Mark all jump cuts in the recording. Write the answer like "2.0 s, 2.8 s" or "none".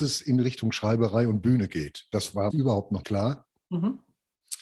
2.5 s, 3.0 s